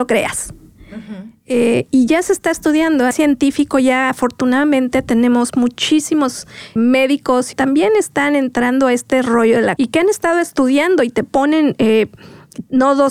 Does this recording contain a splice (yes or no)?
yes